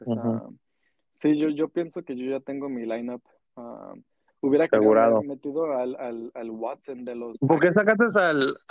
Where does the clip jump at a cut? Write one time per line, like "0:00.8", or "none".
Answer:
none